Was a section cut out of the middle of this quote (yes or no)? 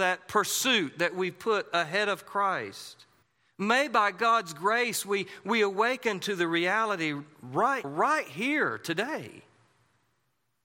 yes